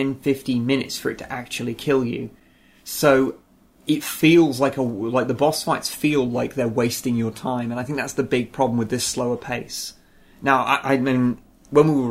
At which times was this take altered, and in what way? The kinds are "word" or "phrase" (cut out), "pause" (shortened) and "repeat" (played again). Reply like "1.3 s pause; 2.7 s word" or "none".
none

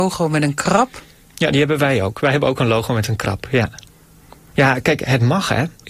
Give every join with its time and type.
none

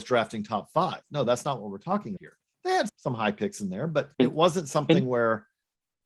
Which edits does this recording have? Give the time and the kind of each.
2.2 s word; 2.9 s word; 4.1 s pause

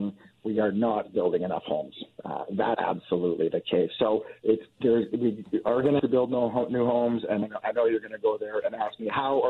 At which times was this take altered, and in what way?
2.7 s word; 4.4 s pause; 6.0 s word; 7.4 s word

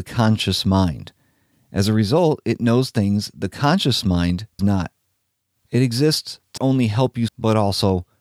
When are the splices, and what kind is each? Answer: 4.6 s word; 6.6 s word; 7.3 s word

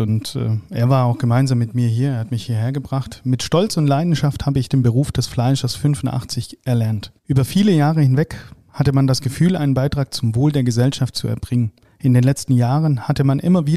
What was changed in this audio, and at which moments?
7.2 s pause; 11.8 s pause

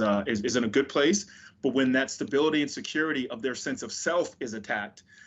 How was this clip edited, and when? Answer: none

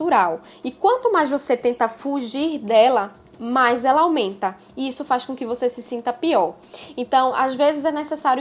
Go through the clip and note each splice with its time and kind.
none

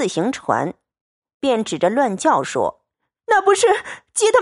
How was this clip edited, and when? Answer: 2.9 s pause

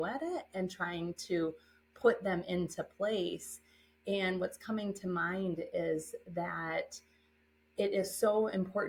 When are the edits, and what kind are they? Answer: none

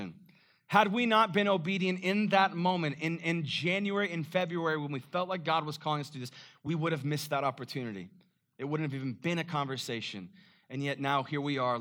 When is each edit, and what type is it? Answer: none

